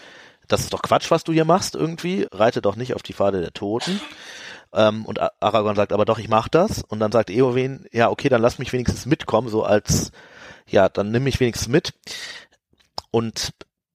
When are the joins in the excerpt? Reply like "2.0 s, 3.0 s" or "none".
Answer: 2.2 s